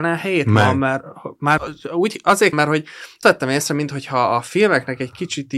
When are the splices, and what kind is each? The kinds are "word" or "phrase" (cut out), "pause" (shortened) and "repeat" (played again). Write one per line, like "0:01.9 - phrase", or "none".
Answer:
0:01.6 - word
0:02.5 - word
0:03.2 - word